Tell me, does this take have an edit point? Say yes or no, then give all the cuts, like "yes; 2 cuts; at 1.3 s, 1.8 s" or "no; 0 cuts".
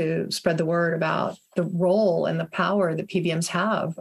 no; 0 cuts